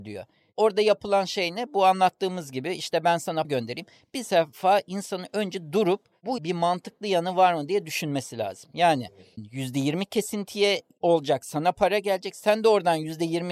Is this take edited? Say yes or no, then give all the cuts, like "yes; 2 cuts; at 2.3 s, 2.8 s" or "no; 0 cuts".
yes; 3 cuts; at 3.4 s, 6.4 s, 9.4 s